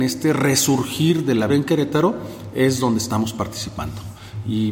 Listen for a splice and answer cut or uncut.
cut